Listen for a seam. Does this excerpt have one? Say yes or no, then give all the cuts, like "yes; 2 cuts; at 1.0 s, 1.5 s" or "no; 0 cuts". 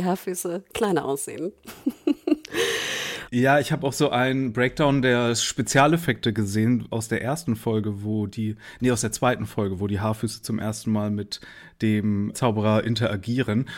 yes; 1 cut; at 12.3 s